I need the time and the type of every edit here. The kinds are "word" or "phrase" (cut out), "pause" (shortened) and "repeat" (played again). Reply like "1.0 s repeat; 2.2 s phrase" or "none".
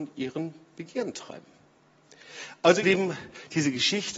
2.8 s word